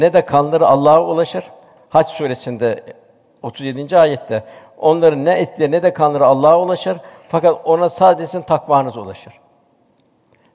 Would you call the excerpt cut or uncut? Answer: uncut